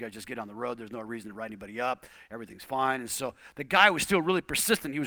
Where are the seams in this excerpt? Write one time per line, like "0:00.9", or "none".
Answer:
none